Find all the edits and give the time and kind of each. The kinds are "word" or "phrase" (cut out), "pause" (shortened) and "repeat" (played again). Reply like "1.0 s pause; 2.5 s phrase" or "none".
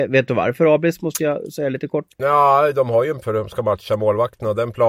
2.1 s pause; 3.2 s word